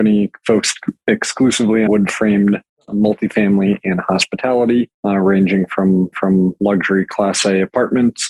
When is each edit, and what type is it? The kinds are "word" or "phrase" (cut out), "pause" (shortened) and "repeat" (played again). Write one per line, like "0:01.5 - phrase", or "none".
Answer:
0:01.9 - word
0:05.0 - pause
0:06.1 - repeat